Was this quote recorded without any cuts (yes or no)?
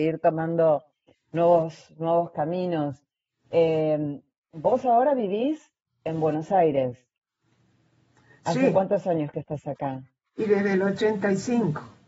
yes